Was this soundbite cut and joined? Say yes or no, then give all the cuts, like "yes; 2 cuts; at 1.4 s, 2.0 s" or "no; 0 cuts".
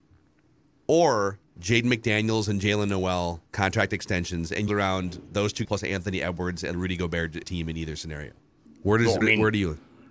yes; 8 cuts; at 1.5 s, 3.5 s, 4.7 s, 5.6 s, 6.7 s, 7.4 s, 8.7 s, 9.2 s